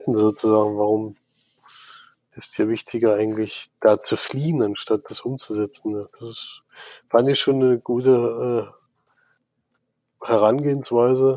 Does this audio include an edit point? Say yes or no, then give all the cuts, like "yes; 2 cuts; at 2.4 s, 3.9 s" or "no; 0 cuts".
no; 0 cuts